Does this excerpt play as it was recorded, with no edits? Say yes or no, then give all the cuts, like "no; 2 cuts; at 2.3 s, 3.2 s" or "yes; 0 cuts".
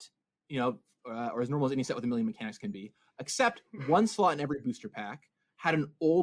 yes; 0 cuts